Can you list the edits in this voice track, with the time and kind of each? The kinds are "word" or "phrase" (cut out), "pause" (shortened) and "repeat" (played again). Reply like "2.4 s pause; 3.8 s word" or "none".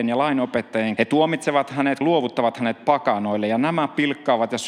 1.0 s phrase; 2.0 s phrase